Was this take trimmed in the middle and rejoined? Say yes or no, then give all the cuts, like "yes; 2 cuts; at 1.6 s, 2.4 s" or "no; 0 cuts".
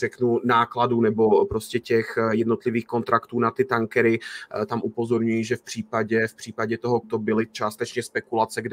yes; 1 cut; at 7.0 s